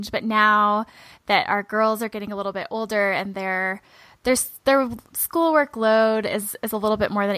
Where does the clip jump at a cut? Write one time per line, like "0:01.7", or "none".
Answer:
none

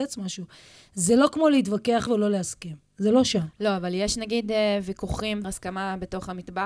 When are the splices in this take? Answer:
0:02.1
0:05.4

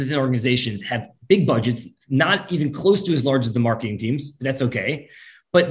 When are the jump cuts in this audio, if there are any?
none

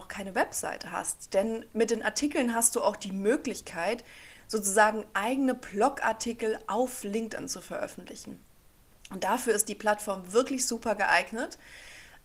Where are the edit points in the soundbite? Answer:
none

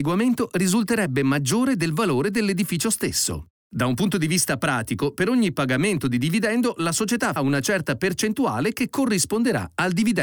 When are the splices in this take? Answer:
0:07.4

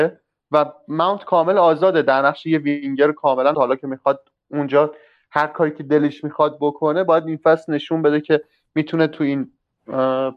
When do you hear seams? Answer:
0:03.5

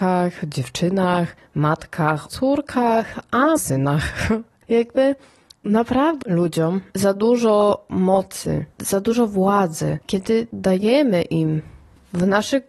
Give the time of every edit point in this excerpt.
0:02.3
0:03.6
0:06.2
0:08.7

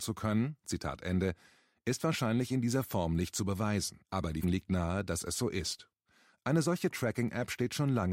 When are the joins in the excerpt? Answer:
0:04.0
0:04.4

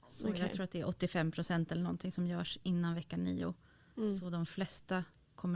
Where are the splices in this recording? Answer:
none

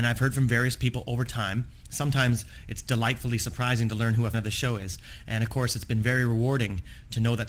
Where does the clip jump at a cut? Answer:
0:04.3

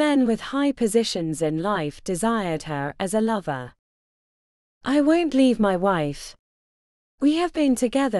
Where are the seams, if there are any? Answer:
none

